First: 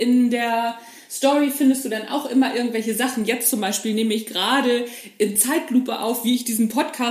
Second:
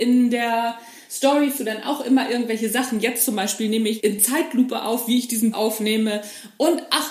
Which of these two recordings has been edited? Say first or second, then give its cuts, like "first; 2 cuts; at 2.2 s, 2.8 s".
second; 3 cuts; at 1.6 s, 4.0 s, 5.5 s